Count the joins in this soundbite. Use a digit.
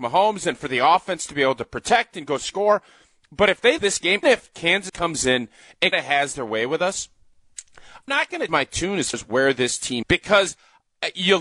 8